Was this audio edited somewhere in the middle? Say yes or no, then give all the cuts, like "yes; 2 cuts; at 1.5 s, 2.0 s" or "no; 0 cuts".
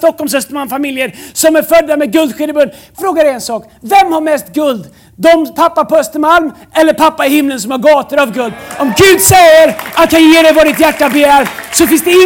yes; 2 cuts; at 3.0 s, 10.1 s